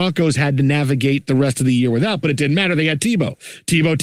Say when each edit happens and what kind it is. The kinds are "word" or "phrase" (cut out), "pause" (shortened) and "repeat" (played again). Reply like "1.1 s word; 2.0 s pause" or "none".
none

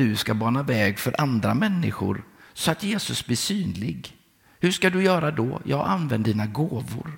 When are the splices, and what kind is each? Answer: none

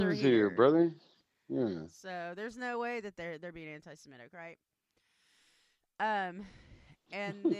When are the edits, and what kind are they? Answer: none

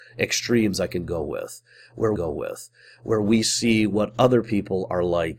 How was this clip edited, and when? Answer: 2.1 s repeat

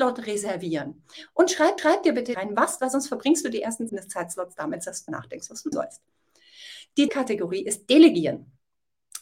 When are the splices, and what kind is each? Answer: 1.8 s repeat; 2.3 s phrase; 2.8 s phrase; 3.9 s phrase; 5.1 s word; 5.7 s word; 7.1 s word

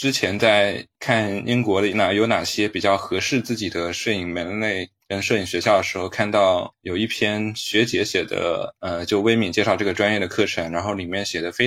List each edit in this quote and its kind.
0.9 s pause

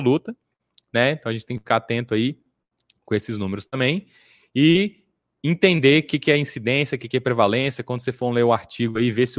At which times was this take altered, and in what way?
none

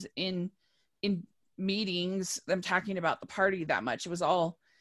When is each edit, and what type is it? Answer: none

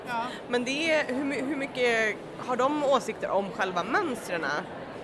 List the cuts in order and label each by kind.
none

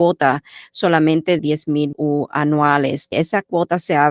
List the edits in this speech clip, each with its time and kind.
1.4 s word; 1.9 s word; 3.1 s word

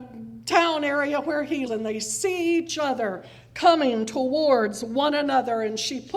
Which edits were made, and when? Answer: 1.7 s word

